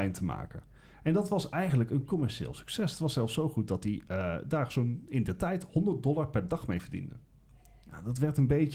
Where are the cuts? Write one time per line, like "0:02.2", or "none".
none

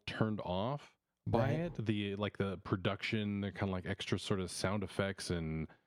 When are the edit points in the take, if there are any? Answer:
0:01.1

